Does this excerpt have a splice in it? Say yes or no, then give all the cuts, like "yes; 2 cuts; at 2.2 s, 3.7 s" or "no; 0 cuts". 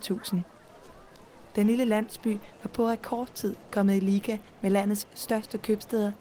no; 0 cuts